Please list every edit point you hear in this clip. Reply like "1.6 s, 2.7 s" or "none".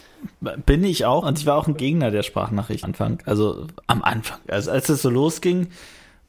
1.2 s, 1.7 s, 2.8 s, 3.8 s, 4.7 s

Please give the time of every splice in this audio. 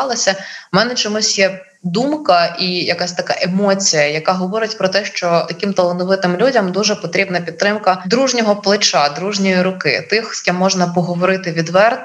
none

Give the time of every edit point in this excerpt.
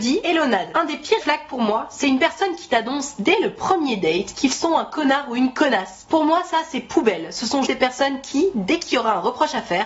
1.2 s, 7.7 s

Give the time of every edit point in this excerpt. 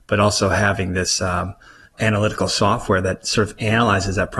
none

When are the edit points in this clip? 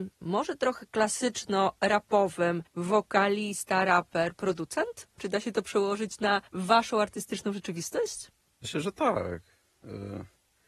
2.7 s, 6.5 s, 8.5 s

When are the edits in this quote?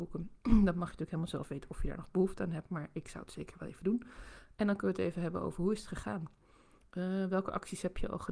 none

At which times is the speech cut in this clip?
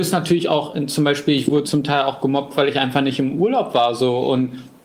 1.6 s

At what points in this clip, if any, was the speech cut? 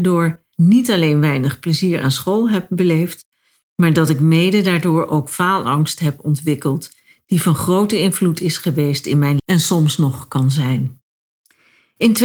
9.4 s

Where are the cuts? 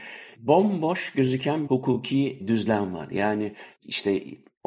1.7 s, 2.4 s

